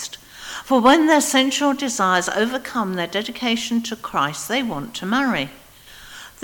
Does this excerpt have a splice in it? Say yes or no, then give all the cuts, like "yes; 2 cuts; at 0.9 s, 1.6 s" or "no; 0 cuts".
no; 0 cuts